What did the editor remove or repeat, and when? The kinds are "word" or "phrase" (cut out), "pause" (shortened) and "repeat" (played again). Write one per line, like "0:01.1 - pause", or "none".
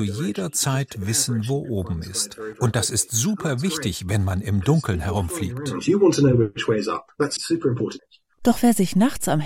none